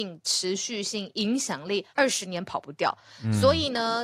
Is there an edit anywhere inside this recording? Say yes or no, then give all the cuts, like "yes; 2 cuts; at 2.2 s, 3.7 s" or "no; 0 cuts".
yes; 1 cut; at 1.9 s